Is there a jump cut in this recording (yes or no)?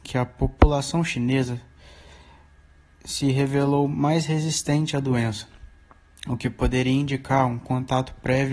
no